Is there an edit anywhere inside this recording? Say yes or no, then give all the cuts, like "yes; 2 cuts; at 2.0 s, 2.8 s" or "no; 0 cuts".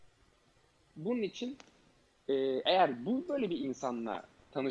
no; 0 cuts